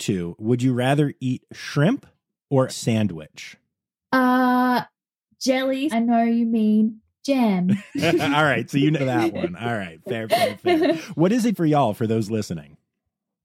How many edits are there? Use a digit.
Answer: 5